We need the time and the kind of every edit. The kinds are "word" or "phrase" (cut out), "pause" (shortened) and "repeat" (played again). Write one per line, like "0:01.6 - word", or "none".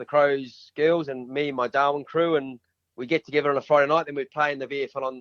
0:02.7 - pause

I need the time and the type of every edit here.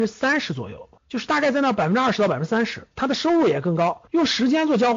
0:01.0 - pause
0:04.1 - pause

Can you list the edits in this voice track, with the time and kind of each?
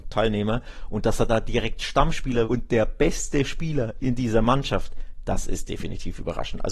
0:01.3 - word
0:02.4 - word

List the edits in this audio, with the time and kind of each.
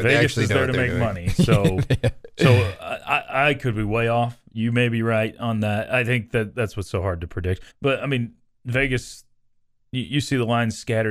0:07.7 - pause

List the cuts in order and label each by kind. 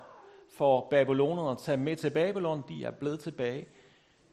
none

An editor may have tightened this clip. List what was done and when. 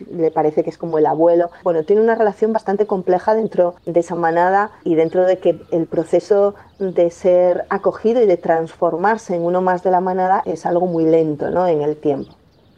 0:03.8 - pause

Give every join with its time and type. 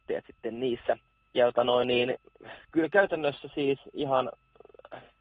0:01.1 - pause

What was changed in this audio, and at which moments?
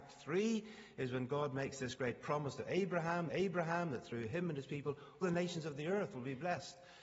0:03.3 - repeat
0:05.2 - word

